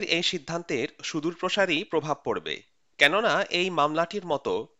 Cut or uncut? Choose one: uncut